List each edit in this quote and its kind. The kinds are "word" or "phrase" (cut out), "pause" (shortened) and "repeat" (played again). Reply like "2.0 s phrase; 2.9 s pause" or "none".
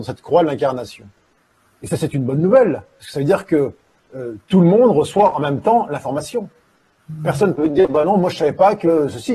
none